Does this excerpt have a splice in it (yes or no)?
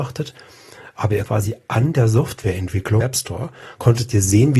yes